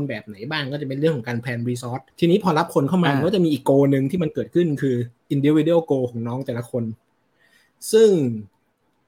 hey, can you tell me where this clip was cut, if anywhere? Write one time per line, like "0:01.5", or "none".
0:02.1
0:05.2